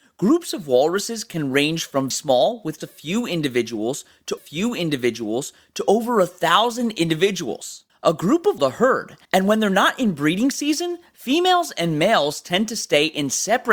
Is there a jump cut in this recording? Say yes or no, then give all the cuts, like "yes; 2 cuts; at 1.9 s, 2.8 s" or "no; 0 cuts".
yes; 6 cuts; at 2.1 s, 2.8 s, 4.4 s, 7.9 s, 8.6 s, 9.2 s